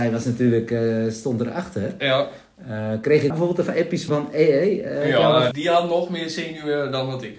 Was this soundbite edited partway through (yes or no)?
yes